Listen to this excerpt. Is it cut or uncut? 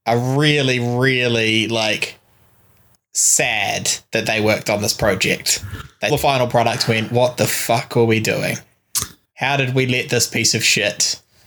cut